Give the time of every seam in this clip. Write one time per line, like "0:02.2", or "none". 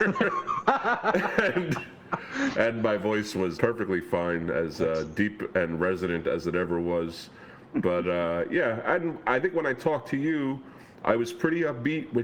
0:03.5